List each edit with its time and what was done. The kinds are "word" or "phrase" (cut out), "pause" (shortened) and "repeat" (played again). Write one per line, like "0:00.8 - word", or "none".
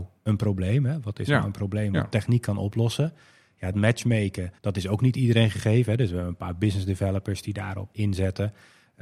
0:03.7 - word
0:04.6 - pause
0:07.9 - word